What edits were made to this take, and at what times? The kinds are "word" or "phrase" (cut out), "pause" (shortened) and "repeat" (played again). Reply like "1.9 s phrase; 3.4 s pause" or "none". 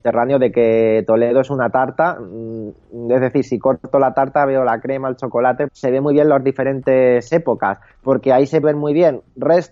5.7 s word; 8.6 s word